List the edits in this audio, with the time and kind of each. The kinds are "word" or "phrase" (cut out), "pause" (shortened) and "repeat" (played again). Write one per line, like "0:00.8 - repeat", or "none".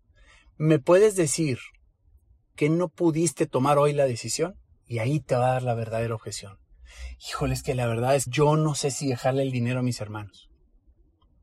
0:02.5 - word
0:04.8 - pause
0:08.3 - word